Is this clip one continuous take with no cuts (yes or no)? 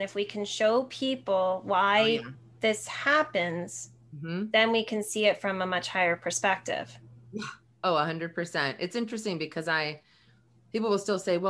yes